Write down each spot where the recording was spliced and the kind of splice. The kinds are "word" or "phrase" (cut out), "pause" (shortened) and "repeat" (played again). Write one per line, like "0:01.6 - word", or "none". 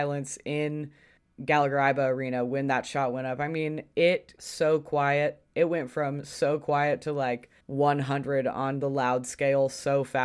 0:01.2 - pause
0:04.4 - word
0:07.6 - pause